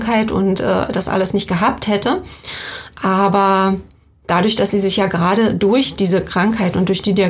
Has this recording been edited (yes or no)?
no